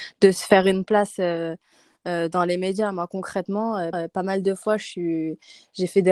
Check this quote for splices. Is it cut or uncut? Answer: cut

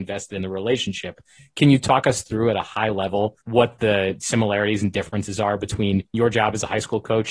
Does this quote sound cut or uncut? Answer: cut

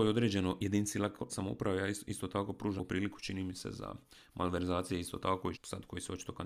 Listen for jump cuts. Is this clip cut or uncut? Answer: cut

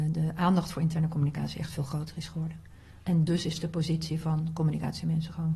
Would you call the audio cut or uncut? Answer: uncut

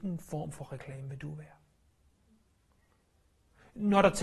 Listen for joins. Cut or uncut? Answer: uncut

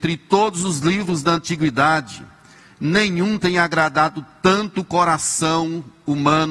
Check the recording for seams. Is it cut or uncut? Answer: uncut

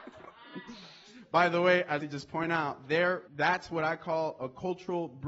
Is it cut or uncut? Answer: cut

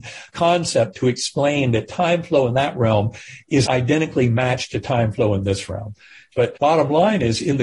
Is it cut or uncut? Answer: cut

